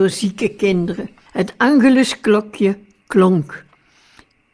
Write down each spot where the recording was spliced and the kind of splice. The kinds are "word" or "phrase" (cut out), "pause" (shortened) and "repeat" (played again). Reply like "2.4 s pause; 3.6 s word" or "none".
1.3 s pause